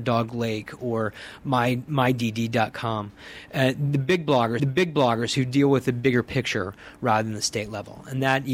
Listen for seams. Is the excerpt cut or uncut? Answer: cut